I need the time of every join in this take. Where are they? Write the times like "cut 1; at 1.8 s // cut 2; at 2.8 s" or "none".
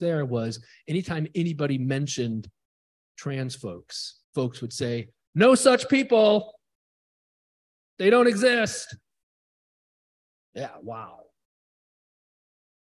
cut 1; at 4.2 s